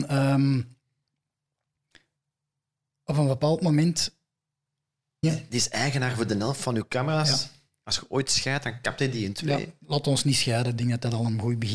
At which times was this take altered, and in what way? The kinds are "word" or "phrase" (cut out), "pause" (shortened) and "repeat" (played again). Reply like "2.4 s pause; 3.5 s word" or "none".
none